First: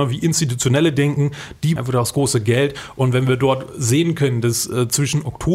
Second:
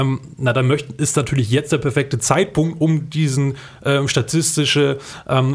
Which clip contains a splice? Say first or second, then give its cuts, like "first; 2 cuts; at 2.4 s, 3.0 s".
first; 1 cut; at 1.8 s